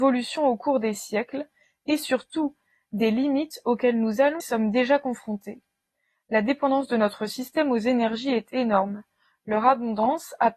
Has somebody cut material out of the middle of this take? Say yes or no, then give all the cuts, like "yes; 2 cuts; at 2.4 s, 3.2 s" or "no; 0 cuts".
yes; 1 cut; at 4.4 s